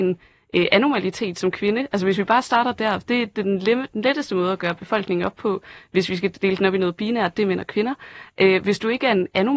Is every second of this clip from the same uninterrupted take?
yes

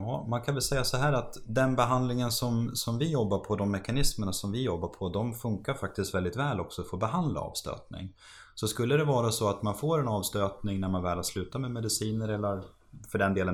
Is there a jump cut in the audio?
no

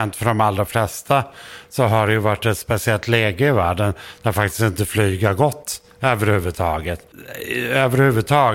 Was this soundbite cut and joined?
no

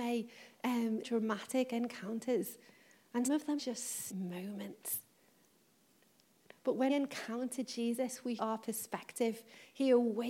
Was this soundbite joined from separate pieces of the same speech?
yes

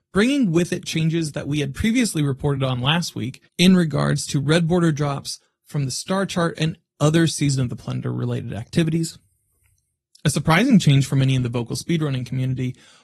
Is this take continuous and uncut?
yes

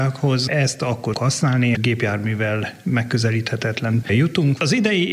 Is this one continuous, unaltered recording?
no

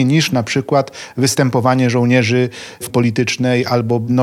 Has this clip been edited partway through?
yes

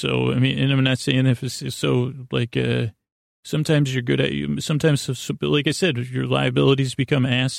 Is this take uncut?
yes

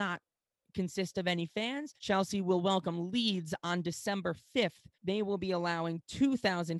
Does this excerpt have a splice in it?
yes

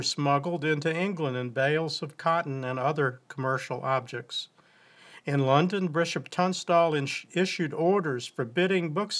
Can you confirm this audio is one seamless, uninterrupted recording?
yes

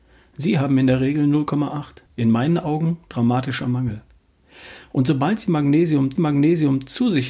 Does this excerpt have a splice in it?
yes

